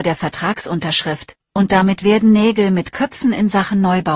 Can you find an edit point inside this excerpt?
no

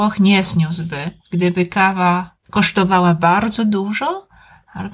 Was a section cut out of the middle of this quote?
yes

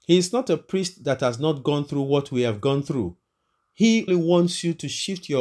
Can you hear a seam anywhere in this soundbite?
yes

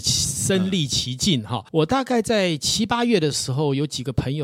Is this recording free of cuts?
no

